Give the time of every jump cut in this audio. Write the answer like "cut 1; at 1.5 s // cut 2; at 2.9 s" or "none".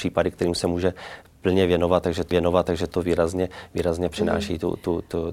cut 1; at 2.3 s // cut 2; at 4.1 s

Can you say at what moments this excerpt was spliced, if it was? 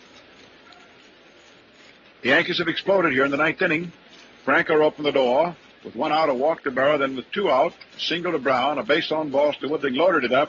none

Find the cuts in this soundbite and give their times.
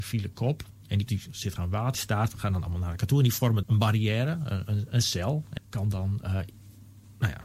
cut 1; at 1.1 s // cut 2; at 1.6 s // cut 3; at 1.9 s // cut 4; at 2.3 s // cut 5; at 3.6 s // cut 6; at 5.6 s

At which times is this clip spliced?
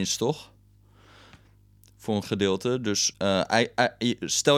cut 1; at 2.2 s // cut 2; at 3.1 s

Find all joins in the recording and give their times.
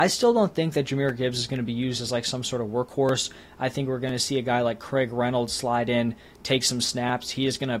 none

